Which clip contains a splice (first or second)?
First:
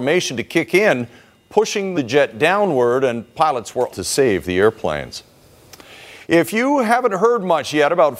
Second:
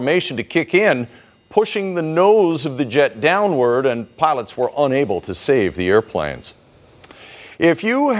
first